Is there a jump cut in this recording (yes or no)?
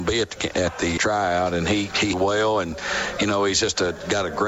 yes